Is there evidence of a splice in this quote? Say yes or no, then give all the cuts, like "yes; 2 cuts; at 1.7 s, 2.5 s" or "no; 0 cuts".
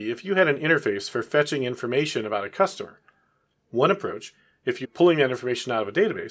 yes; 1 cut; at 4.8 s